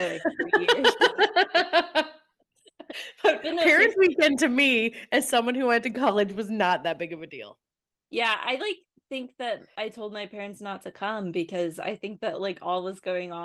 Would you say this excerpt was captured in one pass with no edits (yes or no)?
yes